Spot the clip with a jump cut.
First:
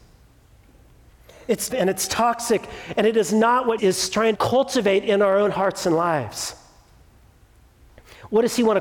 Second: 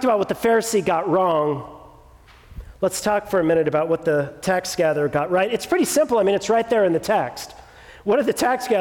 first; 3 cuts; at 1.7 s, 3.8 s, 4.3 s

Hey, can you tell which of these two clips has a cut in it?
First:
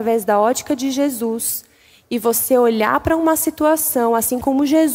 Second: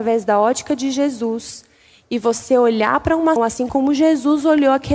second; 1 cut; at 3.4 s

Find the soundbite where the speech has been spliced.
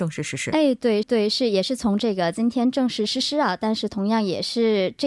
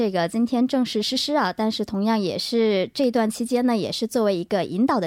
first; 1 cut; at 1.0 s

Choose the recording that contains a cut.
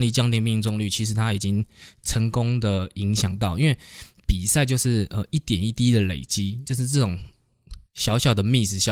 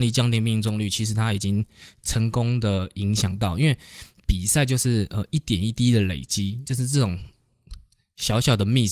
first; 1 cut; at 7.9 s

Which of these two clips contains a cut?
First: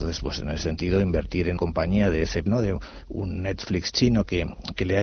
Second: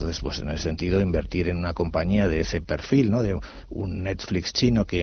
first; 2 cuts; at 1.6 s, 2.5 s

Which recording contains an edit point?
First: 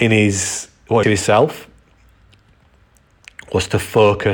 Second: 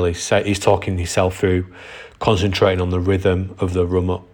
first; 1 cut; at 1.0 s

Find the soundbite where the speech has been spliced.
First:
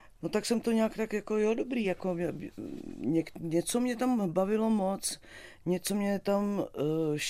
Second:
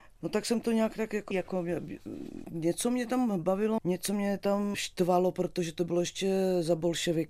second; 4 cuts; at 1.3 s, 2.4 s, 3.8 s, 4.7 s

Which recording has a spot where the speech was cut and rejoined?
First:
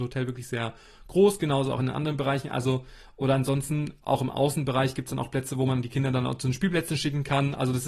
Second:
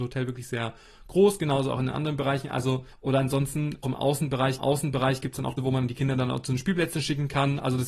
second; 4 cuts; at 2.9 s, 3.8 s, 4.6 s, 5.6 s

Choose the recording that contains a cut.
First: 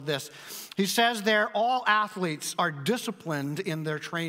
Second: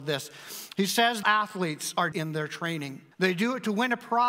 second; 3 cuts; at 1.2 s, 2.1 s, 3.1 s

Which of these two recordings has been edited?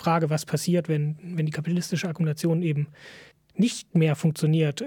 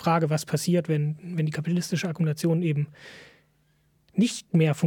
first; 1 cut; at 3.3 s

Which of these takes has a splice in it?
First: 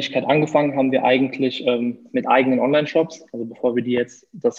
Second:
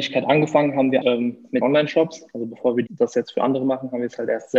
second; 3 cuts; at 1.0 s, 1.6 s, 2.9 s

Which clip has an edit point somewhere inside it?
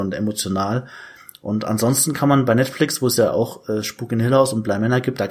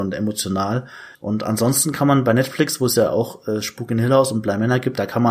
second; 1 cut; at 1.1 s

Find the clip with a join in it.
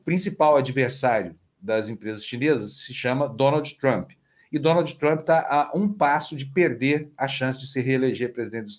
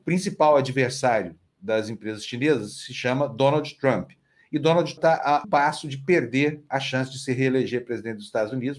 second; 2 cuts; at 5.0 s, 5.4 s

